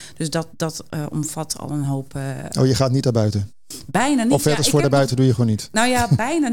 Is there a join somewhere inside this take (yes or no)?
no